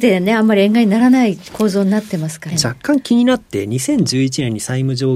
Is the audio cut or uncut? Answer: cut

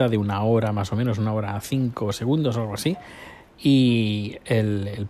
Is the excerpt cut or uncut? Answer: uncut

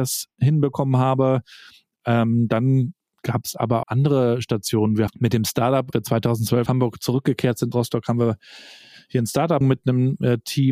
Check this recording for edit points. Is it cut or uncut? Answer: cut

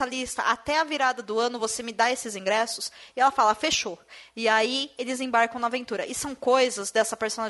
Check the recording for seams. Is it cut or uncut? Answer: uncut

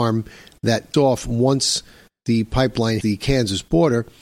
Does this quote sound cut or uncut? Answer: cut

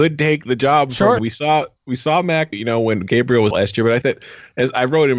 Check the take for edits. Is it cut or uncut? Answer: cut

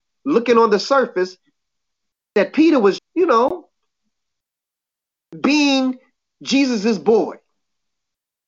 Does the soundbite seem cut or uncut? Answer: cut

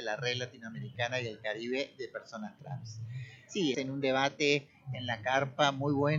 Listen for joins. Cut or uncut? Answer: cut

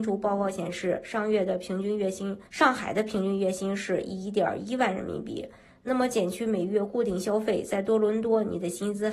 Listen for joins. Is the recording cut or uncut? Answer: cut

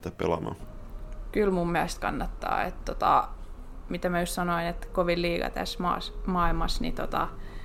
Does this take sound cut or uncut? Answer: uncut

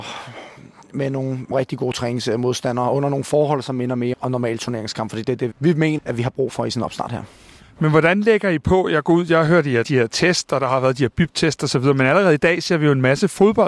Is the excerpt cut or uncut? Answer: cut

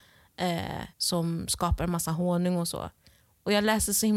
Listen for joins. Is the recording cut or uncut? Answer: cut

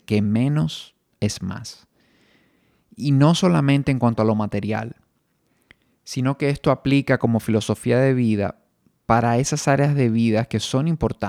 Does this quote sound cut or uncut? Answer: uncut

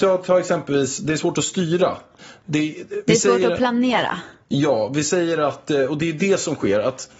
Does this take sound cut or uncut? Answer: uncut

